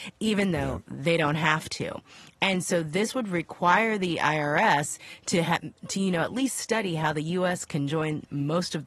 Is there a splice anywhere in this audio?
no; 0 cuts

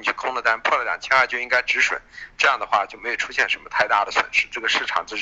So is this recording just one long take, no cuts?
yes; 0 cuts

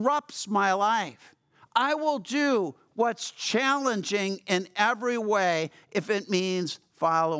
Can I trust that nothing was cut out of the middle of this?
yes; 0 cuts

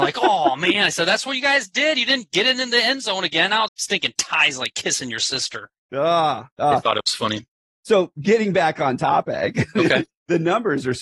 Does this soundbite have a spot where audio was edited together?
yes; 1 cut; at 3.7 s

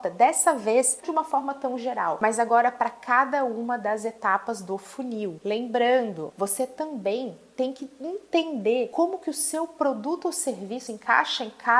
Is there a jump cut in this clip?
yes; 2 cuts; at 1.0 s, 10.9 s

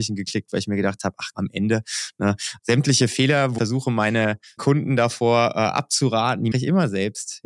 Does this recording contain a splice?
yes; 5 cuts; at 1.3 s, 2.6 s, 3.6 s, 4.6 s, 6.5 s

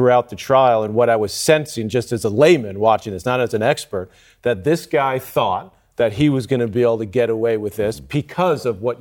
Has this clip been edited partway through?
no; 0 cuts

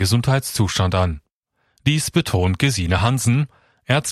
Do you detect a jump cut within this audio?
no; 0 cuts

